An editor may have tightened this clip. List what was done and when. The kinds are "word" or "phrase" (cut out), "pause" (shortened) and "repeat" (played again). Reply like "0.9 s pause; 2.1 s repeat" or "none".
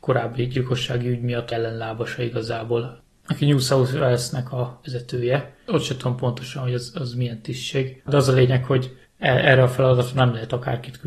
1.5 s phrase